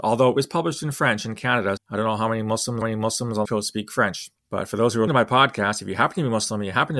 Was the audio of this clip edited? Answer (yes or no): yes